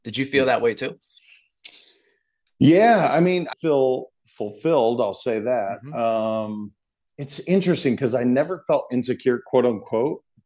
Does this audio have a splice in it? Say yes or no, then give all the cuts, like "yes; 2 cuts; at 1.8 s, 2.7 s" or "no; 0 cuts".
yes; 1 cut; at 3.5 s